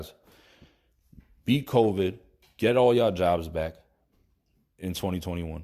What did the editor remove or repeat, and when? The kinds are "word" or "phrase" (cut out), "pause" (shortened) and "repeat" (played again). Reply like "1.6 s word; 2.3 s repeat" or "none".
none